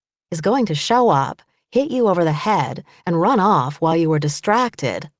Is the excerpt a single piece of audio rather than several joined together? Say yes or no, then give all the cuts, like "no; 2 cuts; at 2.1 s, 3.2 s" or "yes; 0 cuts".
yes; 0 cuts